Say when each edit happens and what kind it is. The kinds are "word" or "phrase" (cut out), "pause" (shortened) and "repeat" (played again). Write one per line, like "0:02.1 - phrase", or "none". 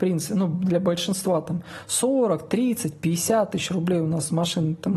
none